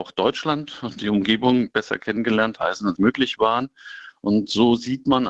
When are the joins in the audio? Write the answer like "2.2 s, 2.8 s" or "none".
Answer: 2.6 s, 3.0 s